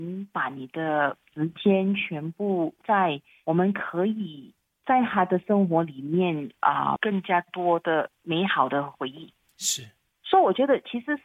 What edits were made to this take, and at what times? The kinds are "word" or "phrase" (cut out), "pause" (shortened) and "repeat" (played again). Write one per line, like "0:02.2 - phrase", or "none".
0:02.8 - word
0:07.0 - word